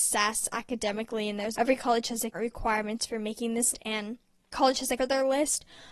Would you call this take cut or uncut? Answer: cut